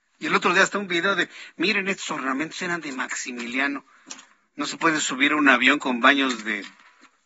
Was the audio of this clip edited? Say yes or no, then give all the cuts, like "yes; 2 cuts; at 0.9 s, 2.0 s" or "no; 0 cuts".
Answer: no; 0 cuts